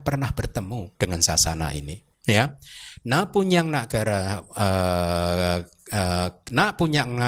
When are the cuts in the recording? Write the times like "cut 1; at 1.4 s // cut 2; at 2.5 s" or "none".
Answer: cut 1; at 0.9 s // cut 2; at 2.1 s